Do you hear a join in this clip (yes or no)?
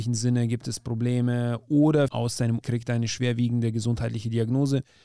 yes